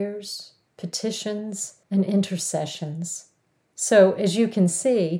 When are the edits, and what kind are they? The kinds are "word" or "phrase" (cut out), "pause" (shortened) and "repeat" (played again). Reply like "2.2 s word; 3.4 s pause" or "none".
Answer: 1.8 s pause; 3.6 s pause